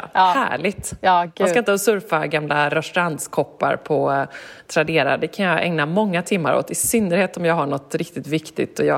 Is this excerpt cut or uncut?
cut